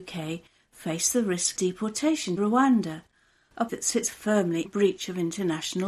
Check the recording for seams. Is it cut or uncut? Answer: cut